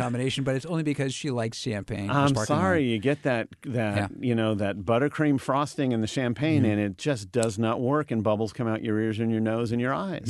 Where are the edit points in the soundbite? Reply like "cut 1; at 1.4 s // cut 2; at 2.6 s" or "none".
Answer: none